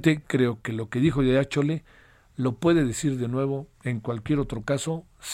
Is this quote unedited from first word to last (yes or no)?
yes